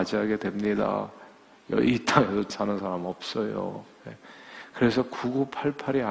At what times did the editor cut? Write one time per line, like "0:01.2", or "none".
0:02.5